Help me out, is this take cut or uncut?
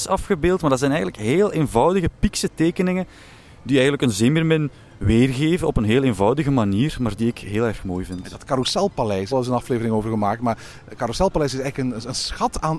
cut